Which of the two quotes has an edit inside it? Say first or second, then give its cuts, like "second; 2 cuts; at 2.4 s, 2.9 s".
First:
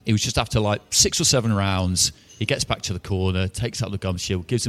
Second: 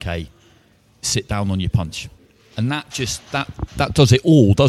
second; 1 cut; at 2.2 s